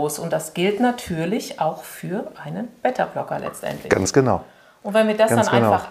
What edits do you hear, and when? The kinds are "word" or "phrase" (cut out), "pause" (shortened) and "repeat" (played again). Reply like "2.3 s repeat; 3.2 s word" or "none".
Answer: none